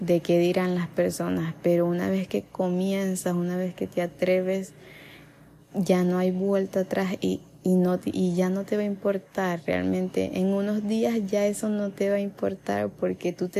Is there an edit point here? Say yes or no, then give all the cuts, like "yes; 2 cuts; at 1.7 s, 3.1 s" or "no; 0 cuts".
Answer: no; 0 cuts